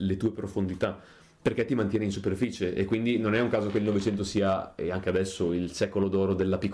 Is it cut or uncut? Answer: uncut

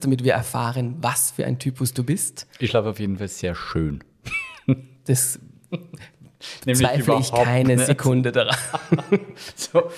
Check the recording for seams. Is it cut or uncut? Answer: uncut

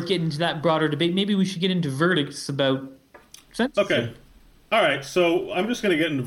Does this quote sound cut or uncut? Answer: uncut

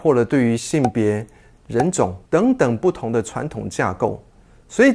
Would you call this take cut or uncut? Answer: cut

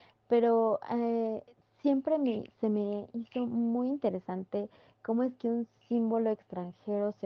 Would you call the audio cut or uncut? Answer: uncut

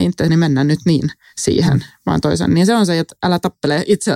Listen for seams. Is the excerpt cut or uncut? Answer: uncut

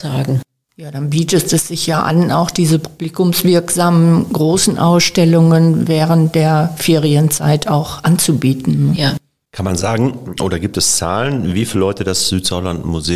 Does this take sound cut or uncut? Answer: uncut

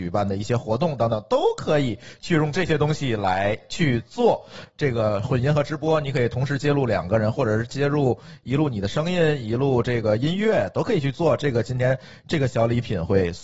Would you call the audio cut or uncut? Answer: uncut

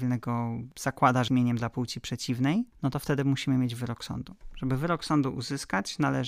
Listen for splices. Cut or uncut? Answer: cut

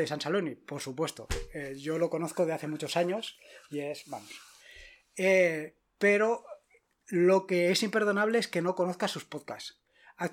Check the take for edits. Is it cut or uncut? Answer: uncut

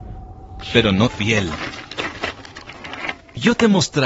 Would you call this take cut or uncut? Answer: cut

